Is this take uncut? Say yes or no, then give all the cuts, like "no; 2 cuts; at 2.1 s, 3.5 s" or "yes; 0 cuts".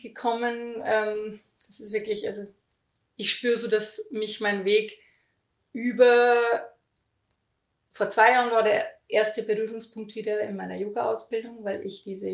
yes; 0 cuts